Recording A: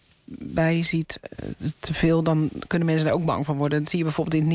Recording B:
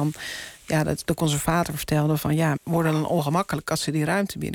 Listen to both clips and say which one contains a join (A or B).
B